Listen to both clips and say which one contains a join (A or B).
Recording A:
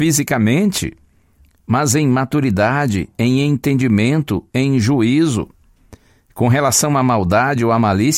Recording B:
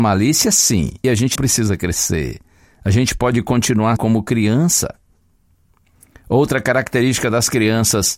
B